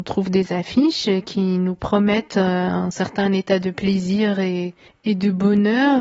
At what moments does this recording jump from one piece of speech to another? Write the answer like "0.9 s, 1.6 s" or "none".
4.9 s